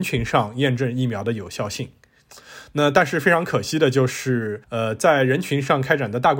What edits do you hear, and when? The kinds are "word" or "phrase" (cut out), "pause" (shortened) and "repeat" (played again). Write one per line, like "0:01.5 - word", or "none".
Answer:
0:04.6 - pause